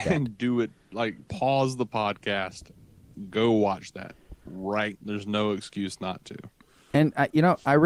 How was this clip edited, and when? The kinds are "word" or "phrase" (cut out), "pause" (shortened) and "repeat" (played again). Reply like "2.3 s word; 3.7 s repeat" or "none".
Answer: 4.9 s word